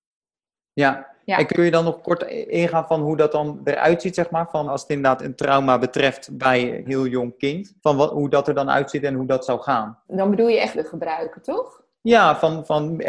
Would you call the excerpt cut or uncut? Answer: cut